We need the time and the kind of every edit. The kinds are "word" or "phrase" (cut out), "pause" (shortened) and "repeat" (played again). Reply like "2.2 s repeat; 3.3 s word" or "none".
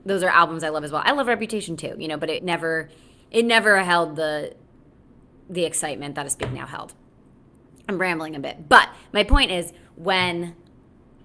2.4 s word